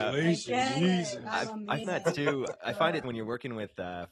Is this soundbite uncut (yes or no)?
no